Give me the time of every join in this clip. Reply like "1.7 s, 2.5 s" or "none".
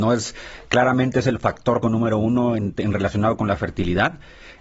1.8 s